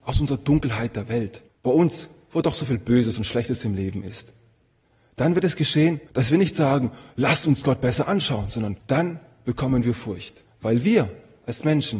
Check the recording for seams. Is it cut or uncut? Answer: cut